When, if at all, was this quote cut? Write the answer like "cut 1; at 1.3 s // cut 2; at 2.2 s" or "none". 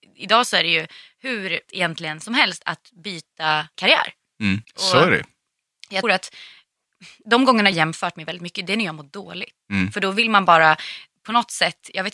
cut 1; at 1.7 s // cut 2; at 3.7 s // cut 3; at 4.6 s // cut 4; at 6.0 s // cut 5; at 7.7 s // cut 6; at 9.6 s